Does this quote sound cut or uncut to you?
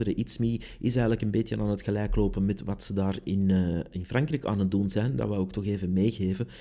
uncut